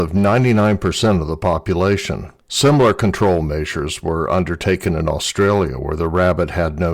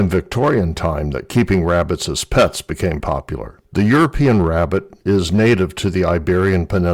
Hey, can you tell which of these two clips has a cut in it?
second; 1 cut; at 3.0 s

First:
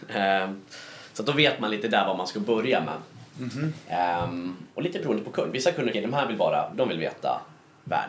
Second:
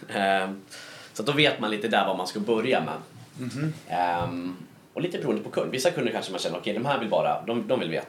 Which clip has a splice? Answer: first; 3 cuts; at 4.7 s, 5.9 s, 6.7 s

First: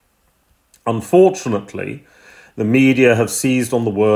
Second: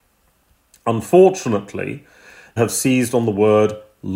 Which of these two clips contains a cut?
second; 1 cut; at 2.6 s

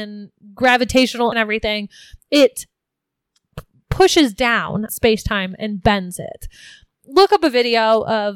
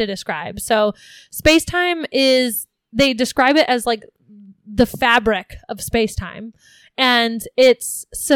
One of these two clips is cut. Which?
first; 2 cuts; at 1.3 s, 4.9 s

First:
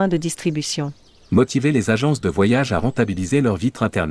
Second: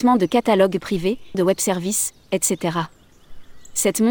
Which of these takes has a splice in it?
second; 1 cut; at 1.3 s

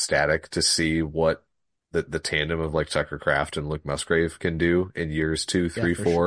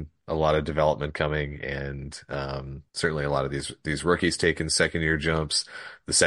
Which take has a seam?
second; 1 cut; at 2.9 s

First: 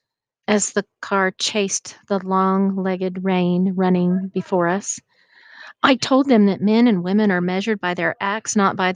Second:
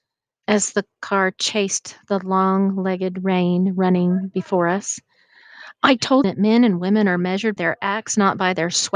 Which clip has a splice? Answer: second; 2 cuts; at 6.2 s, 7.6 s

